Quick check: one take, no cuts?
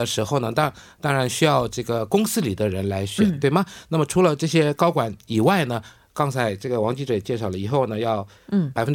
yes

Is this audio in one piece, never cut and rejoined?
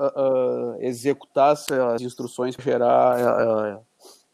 no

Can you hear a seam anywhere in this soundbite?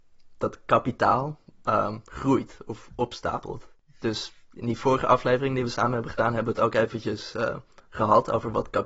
no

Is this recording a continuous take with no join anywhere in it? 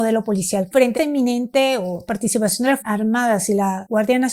no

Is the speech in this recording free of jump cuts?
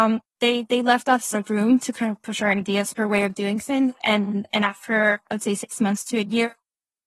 no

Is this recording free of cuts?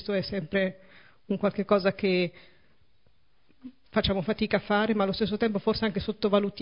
yes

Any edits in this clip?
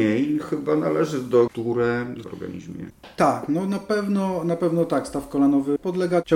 yes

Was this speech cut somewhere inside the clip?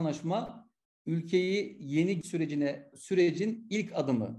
yes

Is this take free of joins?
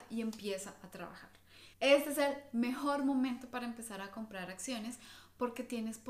no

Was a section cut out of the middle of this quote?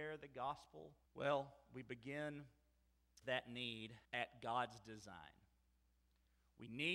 yes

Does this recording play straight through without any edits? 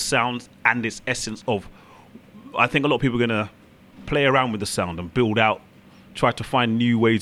no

